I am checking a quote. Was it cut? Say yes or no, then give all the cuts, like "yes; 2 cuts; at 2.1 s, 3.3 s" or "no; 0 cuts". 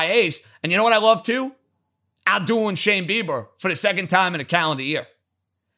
no; 0 cuts